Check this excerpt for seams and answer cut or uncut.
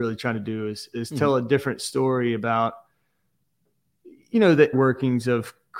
cut